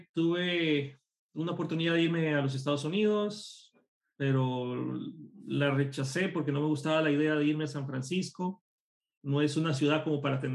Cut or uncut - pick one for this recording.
uncut